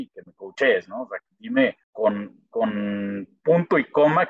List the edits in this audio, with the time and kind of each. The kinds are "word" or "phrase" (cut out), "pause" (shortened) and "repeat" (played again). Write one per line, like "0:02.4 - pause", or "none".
0:01.8 - pause